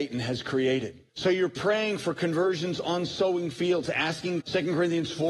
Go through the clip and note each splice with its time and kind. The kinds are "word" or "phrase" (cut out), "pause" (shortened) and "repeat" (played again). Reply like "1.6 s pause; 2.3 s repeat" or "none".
1.1 s pause; 4.4 s word